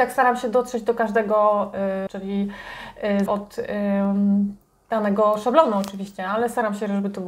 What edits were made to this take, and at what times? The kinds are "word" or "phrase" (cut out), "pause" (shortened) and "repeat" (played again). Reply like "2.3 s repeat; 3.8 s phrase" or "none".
2.1 s phrase; 3.3 s word